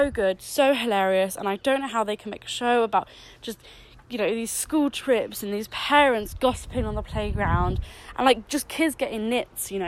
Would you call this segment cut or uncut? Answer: uncut